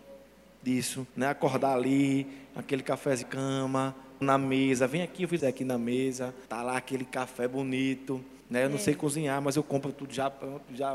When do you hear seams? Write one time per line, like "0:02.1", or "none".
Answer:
0:01.1
0:03.2
0:04.2
0:05.4
0:06.5
0:08.4